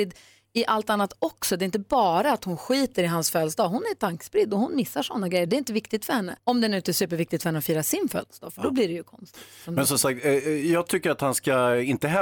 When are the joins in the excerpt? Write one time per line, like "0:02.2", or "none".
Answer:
0:06.4